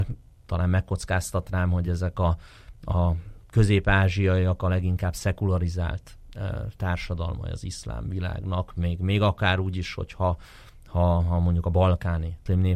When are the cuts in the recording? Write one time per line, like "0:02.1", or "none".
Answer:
none